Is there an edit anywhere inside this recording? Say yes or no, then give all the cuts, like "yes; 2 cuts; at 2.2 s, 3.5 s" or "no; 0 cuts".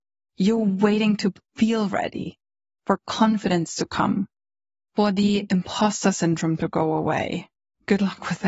no; 0 cuts